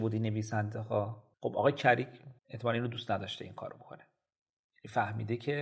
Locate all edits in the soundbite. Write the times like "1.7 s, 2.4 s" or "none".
1.3 s, 2.4 s